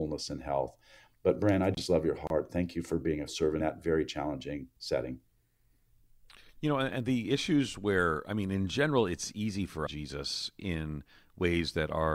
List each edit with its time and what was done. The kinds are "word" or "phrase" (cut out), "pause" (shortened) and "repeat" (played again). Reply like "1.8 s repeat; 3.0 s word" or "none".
3.3 s word; 3.6 s phrase; 9.9 s phrase

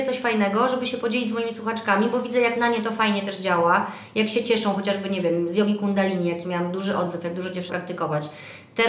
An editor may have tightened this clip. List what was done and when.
7.7 s word

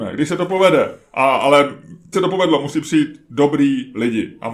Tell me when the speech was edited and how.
2.1 s word

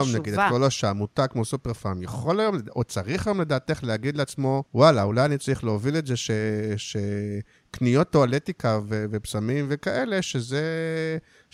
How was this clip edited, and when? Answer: 4.7 s pause

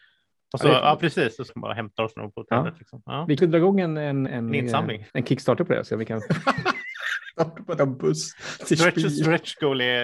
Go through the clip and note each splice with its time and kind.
1.5 s word; 2.2 s word; 3.4 s word; 4.3 s word; 5.1 s pause; 7.4 s pause; 7.8 s phrase

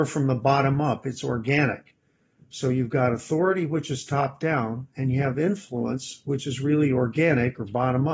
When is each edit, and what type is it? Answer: none

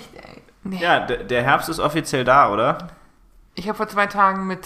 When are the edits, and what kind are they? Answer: none

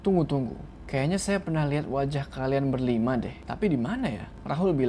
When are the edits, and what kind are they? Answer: none

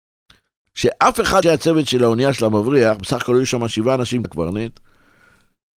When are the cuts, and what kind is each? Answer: 1.4 s word; 4.2 s word

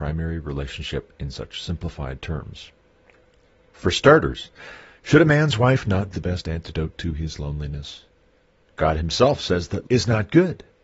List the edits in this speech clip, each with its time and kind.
6.1 s word; 9.8 s word

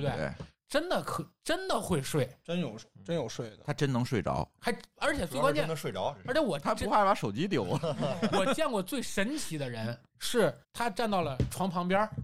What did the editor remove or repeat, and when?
10.6 s pause

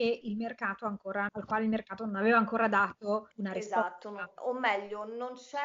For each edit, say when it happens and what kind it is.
1.3 s word; 3.3 s pause

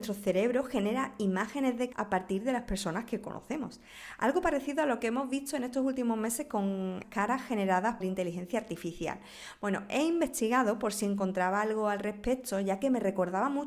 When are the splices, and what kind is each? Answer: 1.9 s word; 7.0 s word; 8.0 s word

